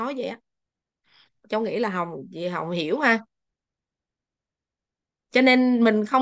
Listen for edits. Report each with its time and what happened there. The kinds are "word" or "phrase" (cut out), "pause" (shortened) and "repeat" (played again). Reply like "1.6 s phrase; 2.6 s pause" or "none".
none